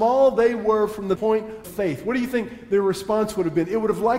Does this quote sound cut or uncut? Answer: cut